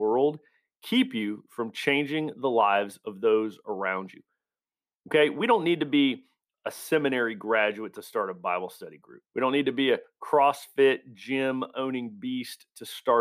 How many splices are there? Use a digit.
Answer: 1